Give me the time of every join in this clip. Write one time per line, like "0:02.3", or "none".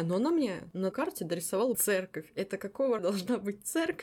0:00.9
0:01.7
0:03.0